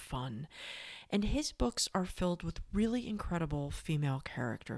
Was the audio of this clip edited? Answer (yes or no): no